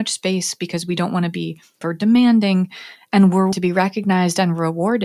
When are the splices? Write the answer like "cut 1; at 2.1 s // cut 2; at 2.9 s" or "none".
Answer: cut 1; at 1.8 s // cut 2; at 3.5 s